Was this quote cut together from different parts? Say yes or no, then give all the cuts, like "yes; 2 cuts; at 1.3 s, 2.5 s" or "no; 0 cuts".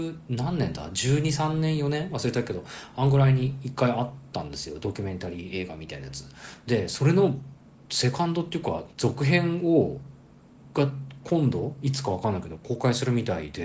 yes; 1 cut; at 8.9 s